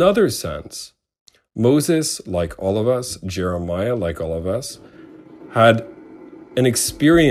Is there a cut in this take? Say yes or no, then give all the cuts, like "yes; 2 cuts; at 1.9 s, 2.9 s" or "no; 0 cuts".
no; 0 cuts